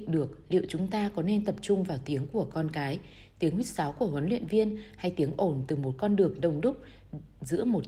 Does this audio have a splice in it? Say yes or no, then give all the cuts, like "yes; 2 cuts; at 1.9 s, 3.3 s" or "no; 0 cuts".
no; 0 cuts